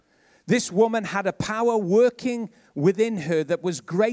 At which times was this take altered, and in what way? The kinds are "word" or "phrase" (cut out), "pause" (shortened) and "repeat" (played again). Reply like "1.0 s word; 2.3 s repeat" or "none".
none